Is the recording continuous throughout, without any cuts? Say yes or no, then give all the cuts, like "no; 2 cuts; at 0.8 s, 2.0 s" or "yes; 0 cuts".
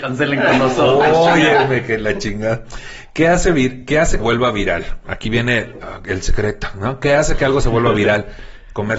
no; 1 cut; at 4.2 s